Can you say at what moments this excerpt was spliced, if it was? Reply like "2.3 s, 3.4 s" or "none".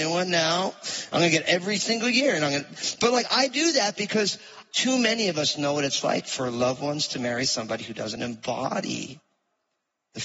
none